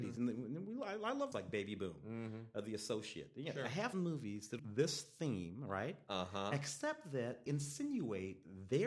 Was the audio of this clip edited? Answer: yes; 4 cuts; at 1.3 s, 3.9 s, 4.6 s, 7.5 s

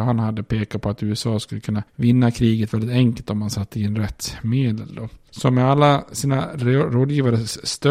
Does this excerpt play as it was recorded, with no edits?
yes; 0 cuts

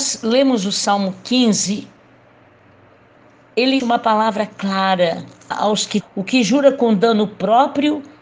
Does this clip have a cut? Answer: yes; 3 cuts; at 3.8 s, 5.5 s, 6.0 s

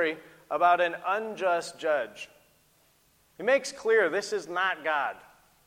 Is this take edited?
no; 0 cuts

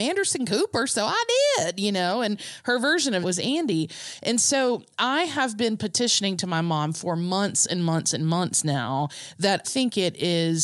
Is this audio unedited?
no; 2 cuts; at 3.2 s, 9.6 s

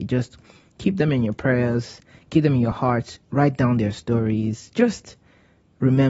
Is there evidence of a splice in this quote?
no; 0 cuts

